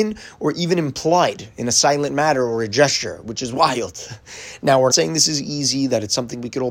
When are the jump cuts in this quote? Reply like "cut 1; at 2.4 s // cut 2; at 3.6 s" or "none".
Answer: cut 1; at 4.9 s